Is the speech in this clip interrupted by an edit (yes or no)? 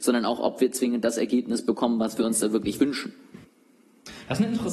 no